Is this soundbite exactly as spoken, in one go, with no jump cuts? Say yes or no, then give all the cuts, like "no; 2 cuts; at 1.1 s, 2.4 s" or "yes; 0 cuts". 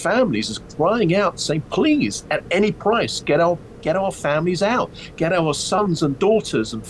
yes; 0 cuts